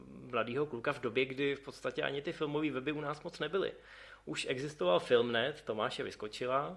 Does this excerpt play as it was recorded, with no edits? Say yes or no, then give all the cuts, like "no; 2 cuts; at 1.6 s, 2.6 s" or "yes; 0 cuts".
yes; 0 cuts